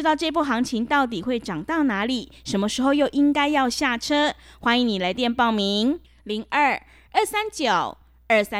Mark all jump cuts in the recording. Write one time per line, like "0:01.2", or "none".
none